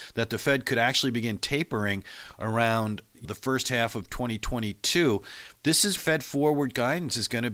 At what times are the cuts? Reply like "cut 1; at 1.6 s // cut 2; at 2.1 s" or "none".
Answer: cut 1; at 3.2 s // cut 2; at 6.0 s